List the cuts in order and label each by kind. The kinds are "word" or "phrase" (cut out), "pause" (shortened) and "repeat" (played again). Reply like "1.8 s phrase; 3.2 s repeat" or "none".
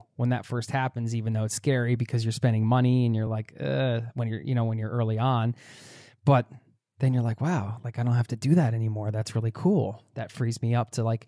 none